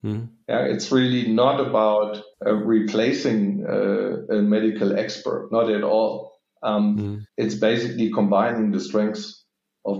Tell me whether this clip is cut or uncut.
cut